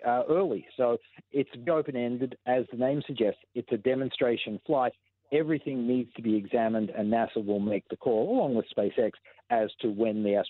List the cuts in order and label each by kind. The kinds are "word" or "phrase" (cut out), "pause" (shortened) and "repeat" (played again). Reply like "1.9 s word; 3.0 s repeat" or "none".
1.7 s word